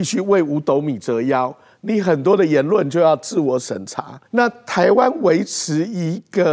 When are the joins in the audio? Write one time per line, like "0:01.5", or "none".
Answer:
0:04.3